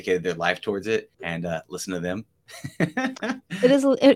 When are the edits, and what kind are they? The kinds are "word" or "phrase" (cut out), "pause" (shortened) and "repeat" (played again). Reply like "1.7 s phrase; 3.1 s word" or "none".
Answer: 1.1 s pause